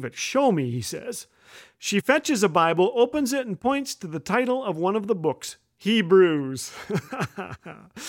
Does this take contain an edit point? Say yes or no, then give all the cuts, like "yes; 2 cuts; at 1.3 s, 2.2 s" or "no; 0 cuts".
no; 0 cuts